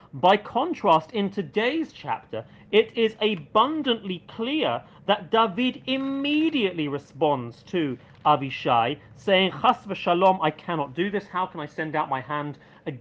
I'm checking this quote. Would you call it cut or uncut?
uncut